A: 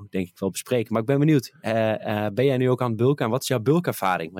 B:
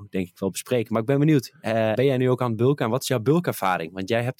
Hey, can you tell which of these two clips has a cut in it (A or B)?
B